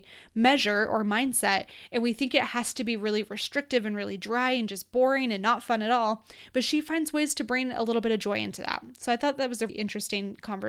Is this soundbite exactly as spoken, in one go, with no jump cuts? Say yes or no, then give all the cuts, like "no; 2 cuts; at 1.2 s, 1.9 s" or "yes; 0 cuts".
no; 1 cut; at 9.7 s